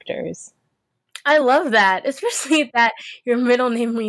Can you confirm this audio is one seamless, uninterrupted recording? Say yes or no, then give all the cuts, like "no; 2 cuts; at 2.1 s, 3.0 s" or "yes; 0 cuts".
yes; 0 cuts